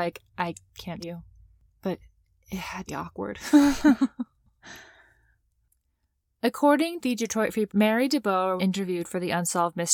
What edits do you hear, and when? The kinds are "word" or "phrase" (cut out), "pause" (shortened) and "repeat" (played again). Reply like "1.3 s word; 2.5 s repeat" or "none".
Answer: 1.0 s word; 2.9 s word; 7.0 s word; 7.7 s word; 8.6 s word